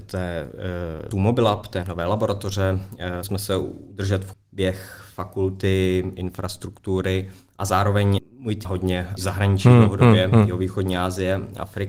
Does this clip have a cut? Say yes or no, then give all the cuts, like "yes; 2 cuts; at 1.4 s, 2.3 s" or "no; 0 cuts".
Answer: yes; 7 cuts; at 1.1 s, 1.8 s, 3.2 s, 4.3 s, 8.2 s, 8.6 s, 9.2 s